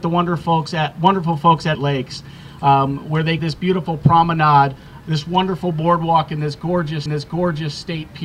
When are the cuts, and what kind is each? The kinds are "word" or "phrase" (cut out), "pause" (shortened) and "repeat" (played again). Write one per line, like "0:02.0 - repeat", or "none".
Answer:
0:01.7 - phrase
0:03.4 - word
0:05.0 - word
0:07.1 - repeat